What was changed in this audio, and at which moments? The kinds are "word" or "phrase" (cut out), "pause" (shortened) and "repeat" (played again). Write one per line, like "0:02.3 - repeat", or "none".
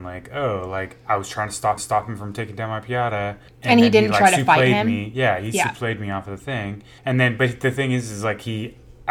0:01.8 - repeat
0:03.5 - pause
0:07.0 - pause